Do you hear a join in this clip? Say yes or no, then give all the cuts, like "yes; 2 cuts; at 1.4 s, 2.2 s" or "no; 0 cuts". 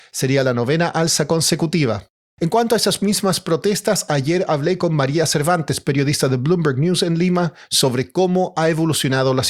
no; 0 cuts